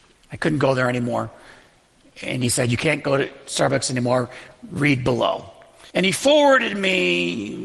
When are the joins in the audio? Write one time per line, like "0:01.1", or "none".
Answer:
0:05.9